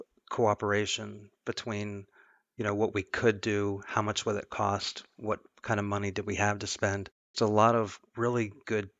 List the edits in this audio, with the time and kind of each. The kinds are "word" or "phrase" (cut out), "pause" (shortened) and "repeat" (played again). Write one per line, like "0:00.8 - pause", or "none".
0:07.3 - word